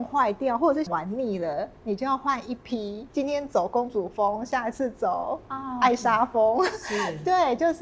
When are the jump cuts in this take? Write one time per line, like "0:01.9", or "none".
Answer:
0:03.1